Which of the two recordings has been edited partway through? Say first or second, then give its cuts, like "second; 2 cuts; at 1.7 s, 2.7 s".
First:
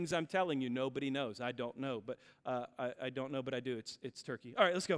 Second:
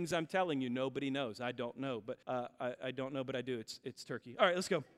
second; 1 cut; at 2.2 s